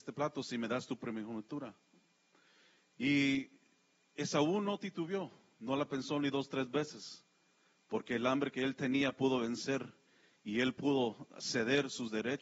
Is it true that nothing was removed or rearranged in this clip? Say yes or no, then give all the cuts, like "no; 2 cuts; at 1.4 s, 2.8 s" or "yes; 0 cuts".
yes; 0 cuts